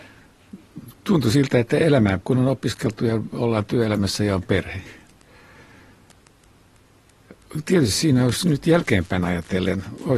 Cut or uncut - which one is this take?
cut